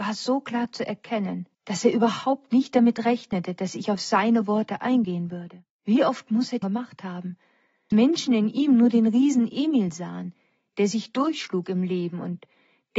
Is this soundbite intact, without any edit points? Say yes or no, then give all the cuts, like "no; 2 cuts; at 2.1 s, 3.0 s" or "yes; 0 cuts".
no; 4 cuts; at 1.5 s, 5.7 s, 6.6 s, 7.9 s